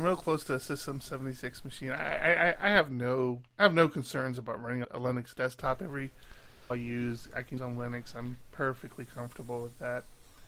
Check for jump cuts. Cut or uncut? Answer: cut